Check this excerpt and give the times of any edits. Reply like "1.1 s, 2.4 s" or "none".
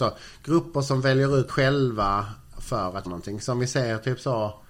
1.5 s, 2.5 s, 3.1 s